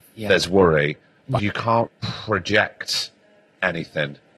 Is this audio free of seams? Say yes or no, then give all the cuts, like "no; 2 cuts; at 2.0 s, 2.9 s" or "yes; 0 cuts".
no; 2 cuts; at 1.4 s, 1.9 s